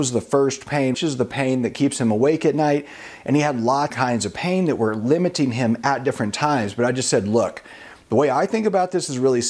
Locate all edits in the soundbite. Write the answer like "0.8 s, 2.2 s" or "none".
0.9 s, 3.9 s